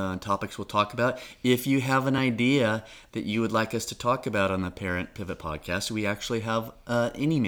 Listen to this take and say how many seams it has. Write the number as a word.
zero